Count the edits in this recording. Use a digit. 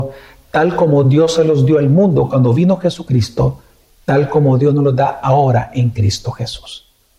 0